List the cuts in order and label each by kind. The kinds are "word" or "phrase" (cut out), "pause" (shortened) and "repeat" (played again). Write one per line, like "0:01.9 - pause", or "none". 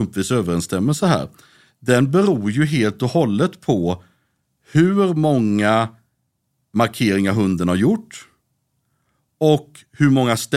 0:06.7 - word